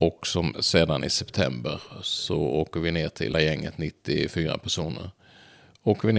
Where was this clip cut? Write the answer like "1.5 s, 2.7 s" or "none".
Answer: 3.3 s